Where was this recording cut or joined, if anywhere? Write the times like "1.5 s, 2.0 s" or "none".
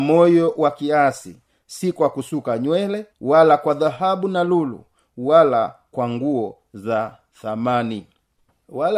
3.1 s